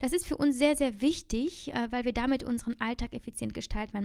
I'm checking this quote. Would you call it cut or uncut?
uncut